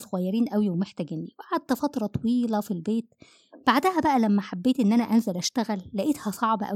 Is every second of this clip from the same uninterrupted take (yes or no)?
yes